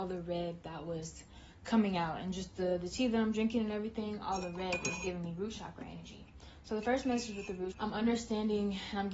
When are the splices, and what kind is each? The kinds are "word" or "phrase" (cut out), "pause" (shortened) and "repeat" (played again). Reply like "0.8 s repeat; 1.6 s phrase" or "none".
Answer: 7.7 s word